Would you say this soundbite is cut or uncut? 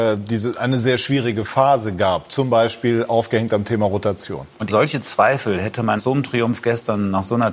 cut